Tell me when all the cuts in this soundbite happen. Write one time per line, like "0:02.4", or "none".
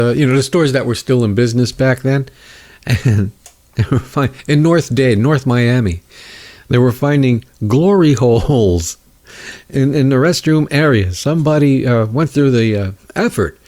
none

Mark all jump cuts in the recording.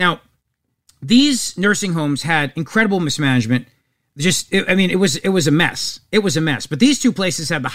none

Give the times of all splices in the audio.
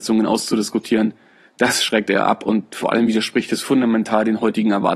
none

